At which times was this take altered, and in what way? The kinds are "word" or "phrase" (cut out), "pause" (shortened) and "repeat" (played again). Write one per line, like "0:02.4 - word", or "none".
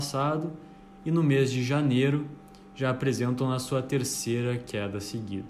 none